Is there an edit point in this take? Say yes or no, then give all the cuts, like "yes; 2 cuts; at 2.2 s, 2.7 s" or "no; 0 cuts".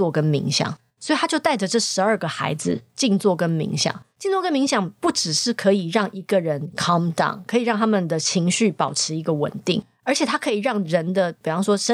no; 0 cuts